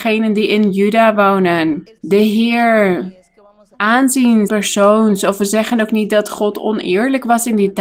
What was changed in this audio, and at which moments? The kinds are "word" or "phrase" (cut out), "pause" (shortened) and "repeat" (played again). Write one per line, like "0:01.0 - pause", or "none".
0:02.0 - pause
0:03.7 - phrase
0:04.5 - word